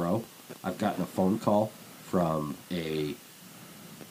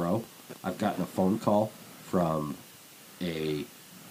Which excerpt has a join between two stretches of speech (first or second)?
first